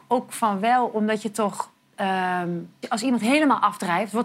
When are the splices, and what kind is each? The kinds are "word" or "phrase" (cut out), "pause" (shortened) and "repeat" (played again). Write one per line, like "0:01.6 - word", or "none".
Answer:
0:02.8 - word